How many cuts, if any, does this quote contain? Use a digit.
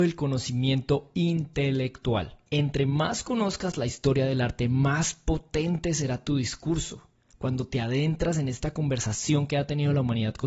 0